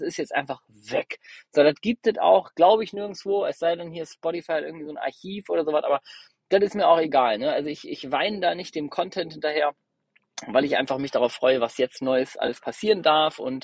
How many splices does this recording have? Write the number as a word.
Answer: zero